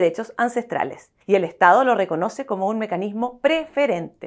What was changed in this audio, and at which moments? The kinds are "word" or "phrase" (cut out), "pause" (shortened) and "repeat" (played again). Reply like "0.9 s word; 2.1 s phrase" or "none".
1.2 s pause